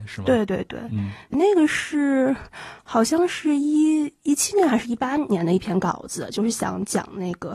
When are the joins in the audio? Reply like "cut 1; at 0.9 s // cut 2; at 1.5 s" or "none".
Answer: cut 1; at 1.3 s